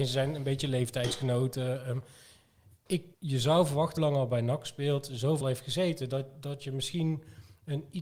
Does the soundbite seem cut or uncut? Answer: cut